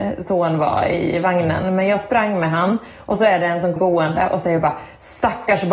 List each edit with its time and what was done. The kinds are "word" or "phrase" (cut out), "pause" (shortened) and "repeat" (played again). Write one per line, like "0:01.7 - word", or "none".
0:03.8 - word